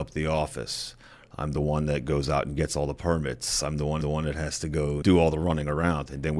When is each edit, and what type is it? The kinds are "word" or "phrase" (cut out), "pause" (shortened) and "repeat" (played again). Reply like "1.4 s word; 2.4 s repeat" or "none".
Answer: 4.0 s repeat; 5.0 s word